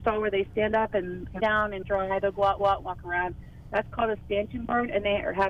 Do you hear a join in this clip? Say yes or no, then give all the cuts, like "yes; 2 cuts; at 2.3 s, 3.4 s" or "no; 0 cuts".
yes; 3 cuts; at 1.4 s, 1.8 s, 2.6 s